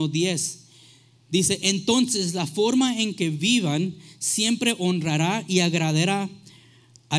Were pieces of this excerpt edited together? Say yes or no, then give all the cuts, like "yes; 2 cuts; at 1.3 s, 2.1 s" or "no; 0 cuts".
no; 0 cuts